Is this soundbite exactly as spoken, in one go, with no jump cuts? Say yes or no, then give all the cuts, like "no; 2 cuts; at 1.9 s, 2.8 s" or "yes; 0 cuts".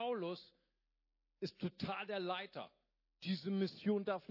yes; 0 cuts